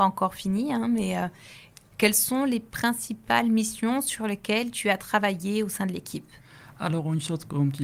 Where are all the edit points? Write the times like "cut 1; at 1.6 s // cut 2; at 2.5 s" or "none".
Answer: none

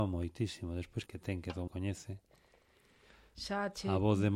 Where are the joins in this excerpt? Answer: cut 1; at 1.1 s // cut 2; at 1.7 s

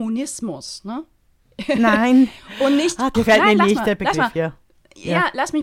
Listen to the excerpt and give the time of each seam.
cut 1; at 3.1 s

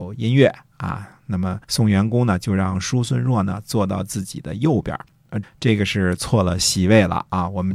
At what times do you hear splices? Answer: cut 1; at 1.6 s // cut 2; at 5.4 s

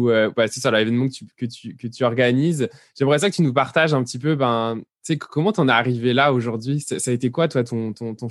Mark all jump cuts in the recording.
none

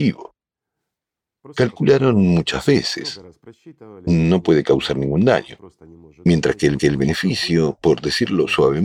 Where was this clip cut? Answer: cut 1; at 6.8 s

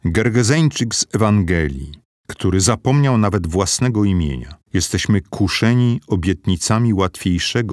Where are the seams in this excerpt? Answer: cut 1; at 2.1 s // cut 2; at 4.6 s

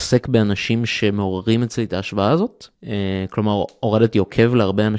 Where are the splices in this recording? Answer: cut 1; at 2.7 s

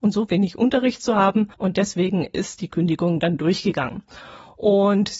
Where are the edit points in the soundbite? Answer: cut 1; at 1.5 s

